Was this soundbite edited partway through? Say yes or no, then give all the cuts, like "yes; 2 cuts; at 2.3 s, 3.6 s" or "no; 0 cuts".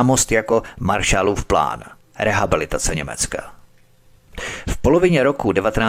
no; 0 cuts